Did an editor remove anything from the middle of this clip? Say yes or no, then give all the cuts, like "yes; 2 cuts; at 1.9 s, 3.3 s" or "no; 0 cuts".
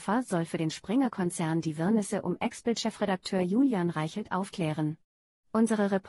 no; 0 cuts